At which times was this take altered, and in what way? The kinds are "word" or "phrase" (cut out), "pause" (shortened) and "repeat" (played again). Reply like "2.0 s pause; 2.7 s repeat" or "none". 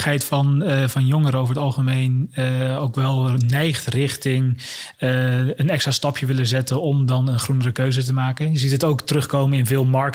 none